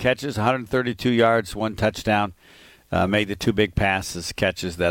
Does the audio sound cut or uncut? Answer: uncut